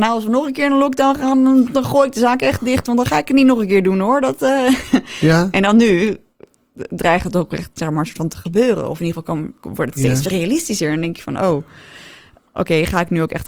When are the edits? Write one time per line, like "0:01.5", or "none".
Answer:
none